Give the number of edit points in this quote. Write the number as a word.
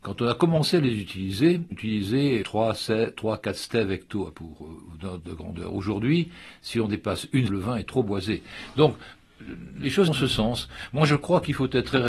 five